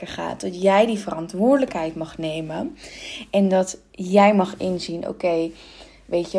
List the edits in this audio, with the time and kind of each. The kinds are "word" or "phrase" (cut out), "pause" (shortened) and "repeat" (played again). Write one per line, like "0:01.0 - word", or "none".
none